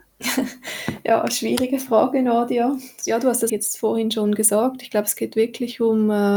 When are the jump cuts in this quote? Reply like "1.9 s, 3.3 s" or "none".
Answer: 3.5 s

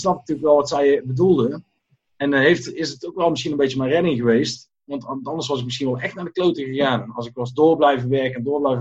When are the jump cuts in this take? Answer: none

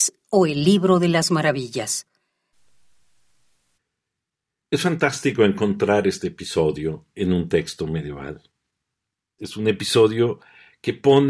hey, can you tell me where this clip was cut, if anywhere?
none

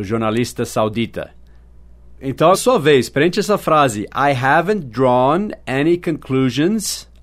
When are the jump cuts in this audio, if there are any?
2.5 s

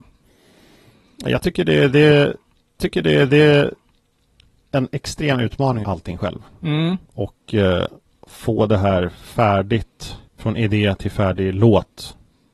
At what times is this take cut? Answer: 2.8 s, 5.8 s, 7.0 s, 8.0 s, 10.3 s

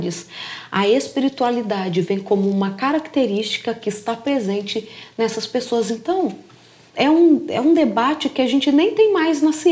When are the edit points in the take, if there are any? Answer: 6.9 s

